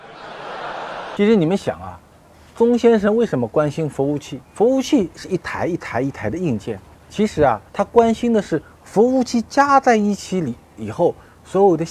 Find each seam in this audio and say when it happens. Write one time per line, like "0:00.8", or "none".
0:04.4
0:06.9
0:07.7